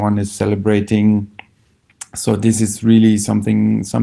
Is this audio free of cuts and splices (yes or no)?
yes